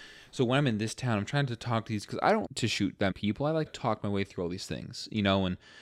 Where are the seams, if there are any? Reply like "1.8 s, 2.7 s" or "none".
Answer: 2.1 s, 2.5 s, 3.1 s, 3.7 s